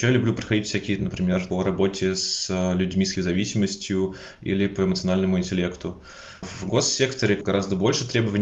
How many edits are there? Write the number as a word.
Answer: two